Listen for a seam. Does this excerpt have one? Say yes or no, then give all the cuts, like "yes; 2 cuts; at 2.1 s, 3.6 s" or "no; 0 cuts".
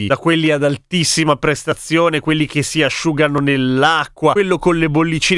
no; 0 cuts